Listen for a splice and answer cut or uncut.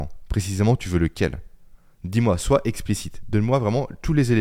uncut